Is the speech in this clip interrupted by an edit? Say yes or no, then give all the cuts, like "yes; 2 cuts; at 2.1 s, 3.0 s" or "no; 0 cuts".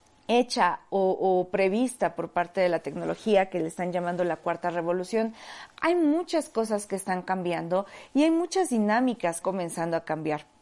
yes; 1 cut; at 9.4 s